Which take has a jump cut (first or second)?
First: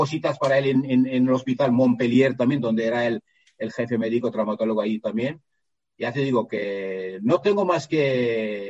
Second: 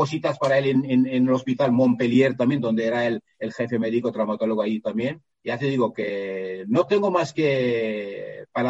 second